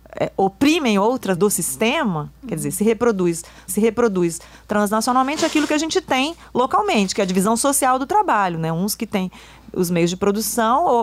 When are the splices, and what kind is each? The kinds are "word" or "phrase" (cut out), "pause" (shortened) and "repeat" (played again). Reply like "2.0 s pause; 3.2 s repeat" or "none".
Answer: 1.4 s phrase; 3.7 s repeat